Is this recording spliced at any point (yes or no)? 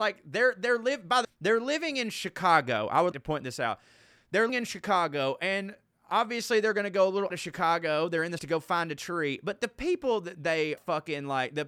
yes